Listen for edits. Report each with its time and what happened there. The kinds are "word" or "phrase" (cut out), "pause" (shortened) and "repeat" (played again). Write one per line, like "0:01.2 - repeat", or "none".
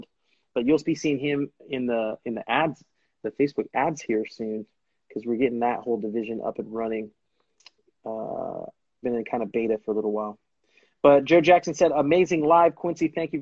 0:09.0 - word